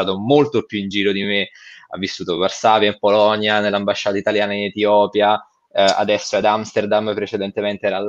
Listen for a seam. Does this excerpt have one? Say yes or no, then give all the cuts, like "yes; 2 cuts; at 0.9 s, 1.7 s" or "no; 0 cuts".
no; 0 cuts